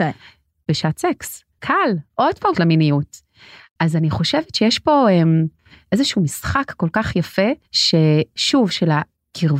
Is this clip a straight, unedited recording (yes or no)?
no